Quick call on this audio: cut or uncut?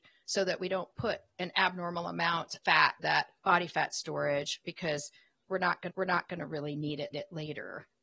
cut